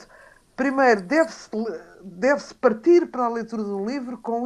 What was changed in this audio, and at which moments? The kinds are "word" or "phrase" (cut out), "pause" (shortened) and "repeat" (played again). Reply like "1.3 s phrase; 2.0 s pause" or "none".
none